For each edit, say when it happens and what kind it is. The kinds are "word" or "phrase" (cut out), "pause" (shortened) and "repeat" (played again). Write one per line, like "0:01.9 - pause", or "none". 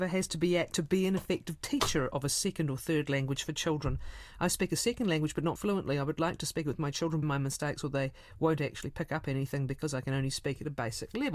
0:05.6 - word
0:07.2 - phrase